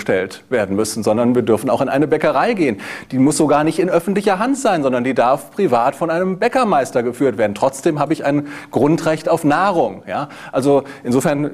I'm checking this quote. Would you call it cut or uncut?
uncut